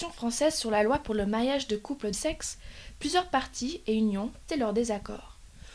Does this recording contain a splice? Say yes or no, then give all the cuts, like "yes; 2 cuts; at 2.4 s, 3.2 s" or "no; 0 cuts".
yes; 2 cuts; at 2.1 s, 4.5 s